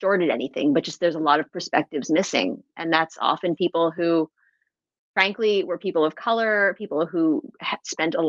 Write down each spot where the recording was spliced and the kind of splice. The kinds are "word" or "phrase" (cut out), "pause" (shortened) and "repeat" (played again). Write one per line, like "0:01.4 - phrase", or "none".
none